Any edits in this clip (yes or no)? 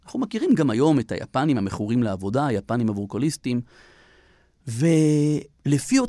no